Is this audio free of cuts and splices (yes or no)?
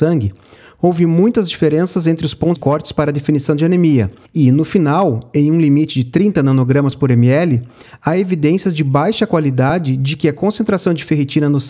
no